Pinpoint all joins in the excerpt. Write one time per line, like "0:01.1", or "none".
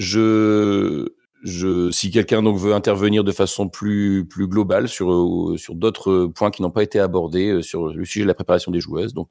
0:01.2